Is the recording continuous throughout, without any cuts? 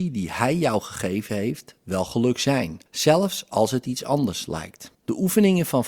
no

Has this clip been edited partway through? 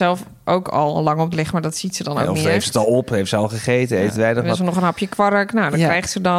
yes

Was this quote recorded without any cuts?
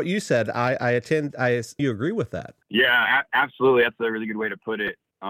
no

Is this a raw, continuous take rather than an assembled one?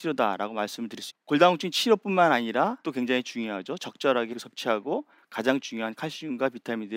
no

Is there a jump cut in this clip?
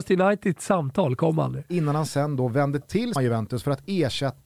yes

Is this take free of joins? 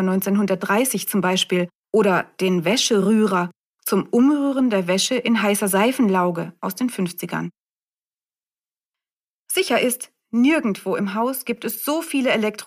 no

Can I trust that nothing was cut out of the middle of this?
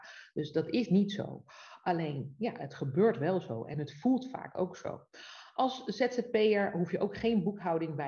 yes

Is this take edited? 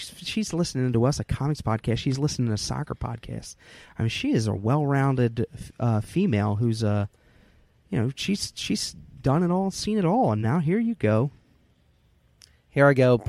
no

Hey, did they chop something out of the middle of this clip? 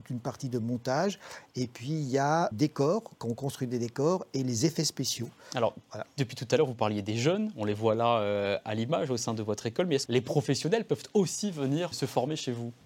yes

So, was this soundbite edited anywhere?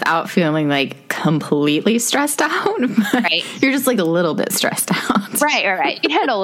no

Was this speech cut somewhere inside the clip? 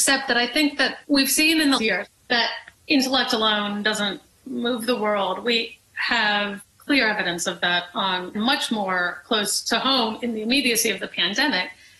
yes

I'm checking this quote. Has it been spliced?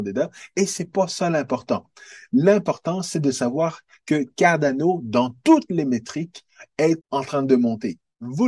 yes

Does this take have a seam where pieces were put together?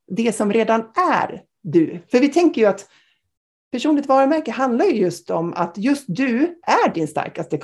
no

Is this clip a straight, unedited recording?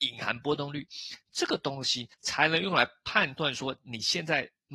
no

